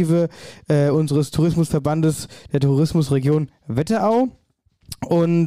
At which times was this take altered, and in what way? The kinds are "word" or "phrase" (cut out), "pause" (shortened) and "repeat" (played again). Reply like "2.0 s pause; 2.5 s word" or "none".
none